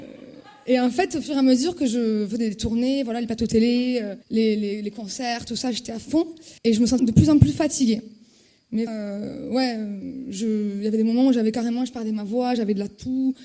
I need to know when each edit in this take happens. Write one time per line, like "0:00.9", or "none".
0:04.2
0:06.6
0:07.0
0:08.9